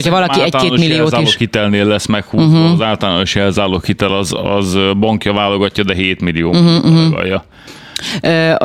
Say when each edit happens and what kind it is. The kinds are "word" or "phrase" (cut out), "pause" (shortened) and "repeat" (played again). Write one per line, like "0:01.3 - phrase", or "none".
none